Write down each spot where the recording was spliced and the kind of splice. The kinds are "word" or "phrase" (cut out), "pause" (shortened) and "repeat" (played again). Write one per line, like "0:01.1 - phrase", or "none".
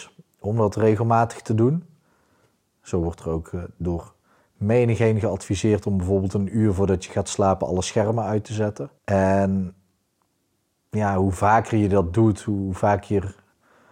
0:09.0 - pause